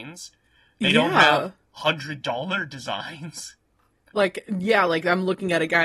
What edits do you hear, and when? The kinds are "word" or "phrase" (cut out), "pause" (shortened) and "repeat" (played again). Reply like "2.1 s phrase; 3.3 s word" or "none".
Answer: none